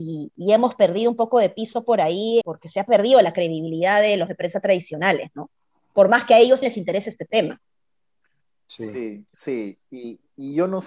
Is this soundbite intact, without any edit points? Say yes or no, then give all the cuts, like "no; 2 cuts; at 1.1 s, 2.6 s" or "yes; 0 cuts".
no; 4 cuts; at 2.4 s, 4.3 s, 6.6 s, 9.3 s